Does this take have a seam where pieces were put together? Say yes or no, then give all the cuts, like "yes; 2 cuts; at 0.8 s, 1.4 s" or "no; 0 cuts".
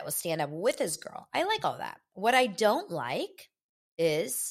no; 0 cuts